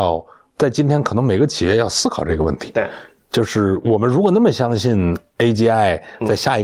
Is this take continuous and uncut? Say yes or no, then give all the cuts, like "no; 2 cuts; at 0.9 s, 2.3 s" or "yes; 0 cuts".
yes; 0 cuts